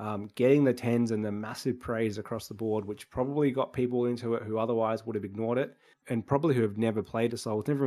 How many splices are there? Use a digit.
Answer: 1